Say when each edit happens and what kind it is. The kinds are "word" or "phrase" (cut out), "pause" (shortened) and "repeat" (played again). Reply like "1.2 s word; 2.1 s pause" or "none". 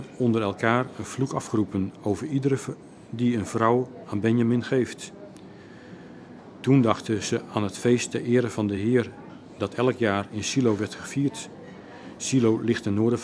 none